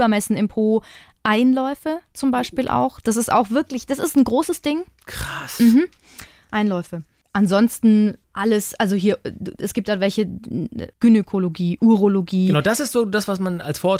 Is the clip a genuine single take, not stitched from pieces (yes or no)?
yes